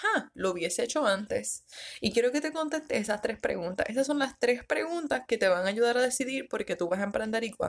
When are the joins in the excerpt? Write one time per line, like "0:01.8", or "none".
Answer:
none